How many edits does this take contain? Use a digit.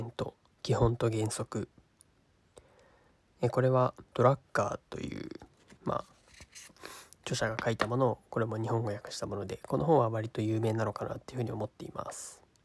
2